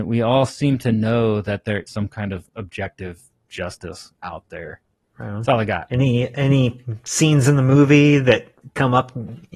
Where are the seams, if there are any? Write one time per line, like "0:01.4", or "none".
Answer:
0:01.9